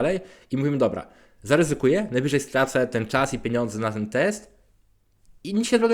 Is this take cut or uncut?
uncut